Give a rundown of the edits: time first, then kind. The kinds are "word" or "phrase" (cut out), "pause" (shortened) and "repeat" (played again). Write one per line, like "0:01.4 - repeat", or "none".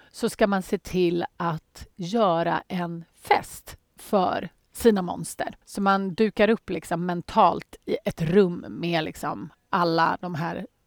0:05.6 - pause
0:07.8 - pause